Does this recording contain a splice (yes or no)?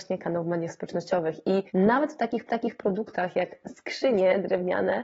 yes